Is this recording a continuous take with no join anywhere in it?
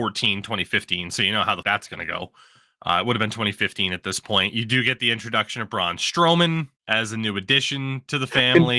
no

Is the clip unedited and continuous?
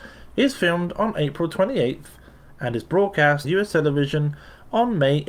no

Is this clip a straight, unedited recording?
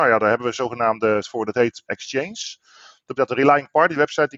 no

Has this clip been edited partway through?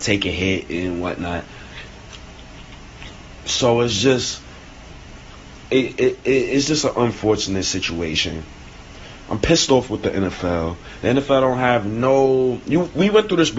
no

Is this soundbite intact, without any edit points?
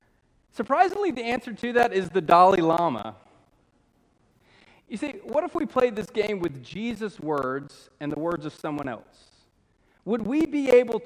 yes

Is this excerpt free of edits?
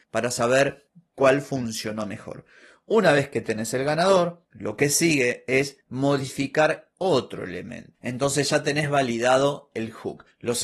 yes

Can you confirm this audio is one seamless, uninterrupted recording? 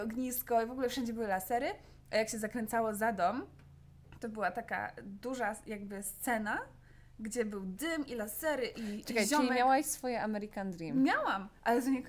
yes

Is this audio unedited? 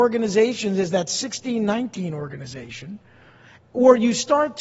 yes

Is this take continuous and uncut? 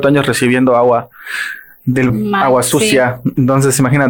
no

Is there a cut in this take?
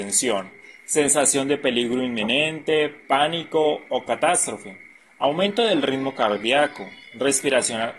no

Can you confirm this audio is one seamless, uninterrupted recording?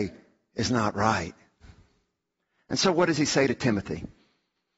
yes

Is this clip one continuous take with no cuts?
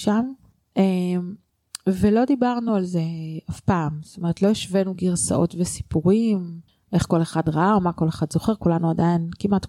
yes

